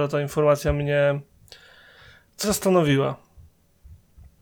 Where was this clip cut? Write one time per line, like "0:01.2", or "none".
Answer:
0:02.4

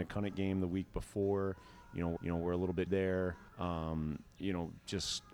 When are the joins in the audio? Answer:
0:02.2
0:02.9
0:03.5

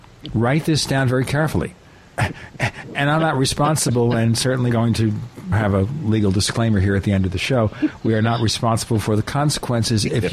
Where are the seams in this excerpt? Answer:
0:04.7
0:05.5

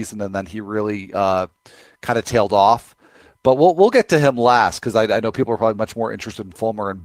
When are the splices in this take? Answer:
none

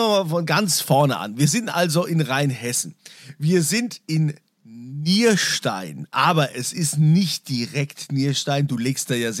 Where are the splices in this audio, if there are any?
none

